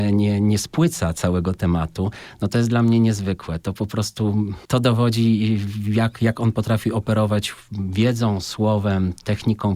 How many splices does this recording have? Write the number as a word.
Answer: zero